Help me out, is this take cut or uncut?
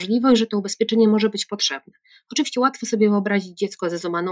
uncut